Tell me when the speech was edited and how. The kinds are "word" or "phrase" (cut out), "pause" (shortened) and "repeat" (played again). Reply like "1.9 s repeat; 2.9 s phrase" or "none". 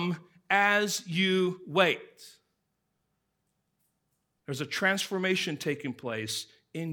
none